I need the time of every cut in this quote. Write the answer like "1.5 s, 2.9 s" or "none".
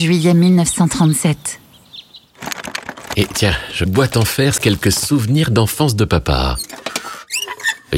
3.9 s, 4.6 s